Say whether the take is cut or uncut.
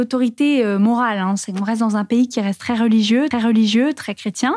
cut